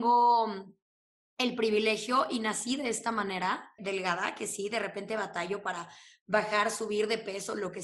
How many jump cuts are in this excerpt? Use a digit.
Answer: 1